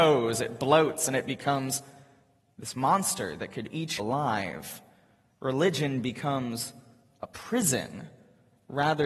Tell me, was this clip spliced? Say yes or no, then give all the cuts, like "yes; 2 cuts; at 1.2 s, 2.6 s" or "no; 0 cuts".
yes; 1 cut; at 4.0 s